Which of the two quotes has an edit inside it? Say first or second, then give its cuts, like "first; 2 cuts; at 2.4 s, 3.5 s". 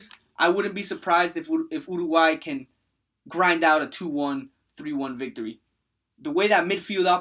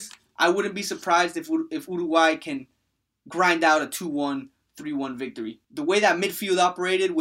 second; 1 cut; at 5.6 s